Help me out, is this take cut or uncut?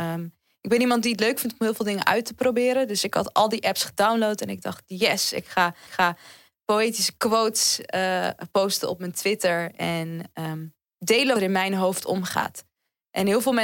cut